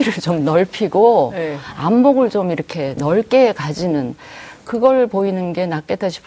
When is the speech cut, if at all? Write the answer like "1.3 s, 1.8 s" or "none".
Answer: 3.0 s